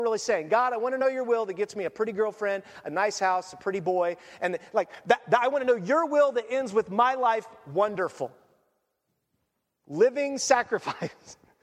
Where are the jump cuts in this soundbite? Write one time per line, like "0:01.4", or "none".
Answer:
none